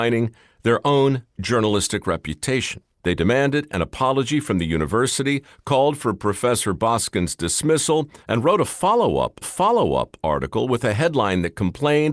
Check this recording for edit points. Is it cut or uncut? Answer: cut